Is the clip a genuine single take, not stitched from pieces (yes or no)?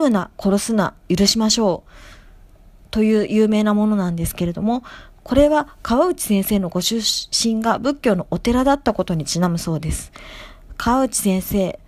yes